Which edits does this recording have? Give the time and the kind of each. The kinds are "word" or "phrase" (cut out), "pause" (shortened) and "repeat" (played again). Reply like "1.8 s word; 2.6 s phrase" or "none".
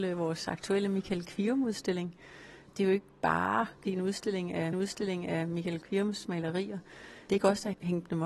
4.7 s repeat